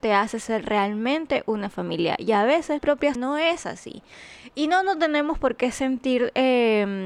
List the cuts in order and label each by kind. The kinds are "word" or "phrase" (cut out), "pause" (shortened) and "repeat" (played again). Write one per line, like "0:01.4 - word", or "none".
0:02.8 - word
0:03.1 - word